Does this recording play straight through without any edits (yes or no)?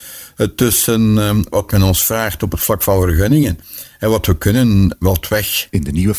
yes